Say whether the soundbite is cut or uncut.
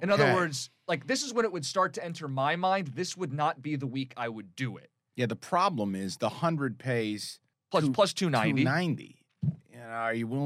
cut